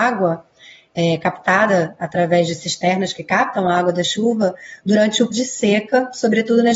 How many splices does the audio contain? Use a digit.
1